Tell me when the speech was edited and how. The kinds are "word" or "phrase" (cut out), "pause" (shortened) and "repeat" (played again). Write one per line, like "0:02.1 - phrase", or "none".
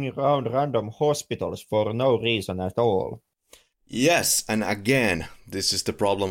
none